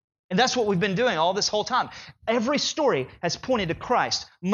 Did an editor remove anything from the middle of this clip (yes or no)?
no